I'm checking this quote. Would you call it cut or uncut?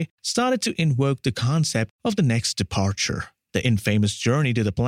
uncut